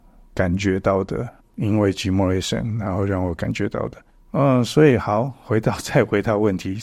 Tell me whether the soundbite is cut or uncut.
cut